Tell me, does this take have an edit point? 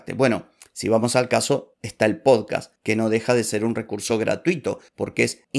no; 0 cuts

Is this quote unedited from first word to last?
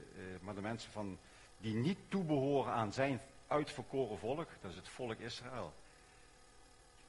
no; 1 cut; at 1.5 s

